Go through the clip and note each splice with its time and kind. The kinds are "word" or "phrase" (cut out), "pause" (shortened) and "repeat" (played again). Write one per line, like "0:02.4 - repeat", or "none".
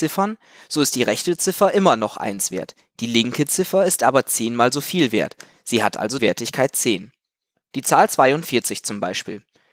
0:06.2 - word